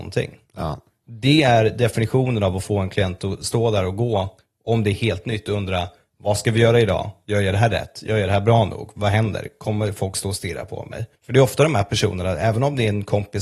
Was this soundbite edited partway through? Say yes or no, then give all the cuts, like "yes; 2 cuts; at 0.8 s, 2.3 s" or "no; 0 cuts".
yes; 1 cut; at 11.2 s